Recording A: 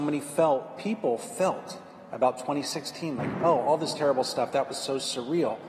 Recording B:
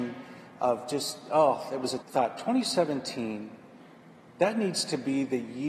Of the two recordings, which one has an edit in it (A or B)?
B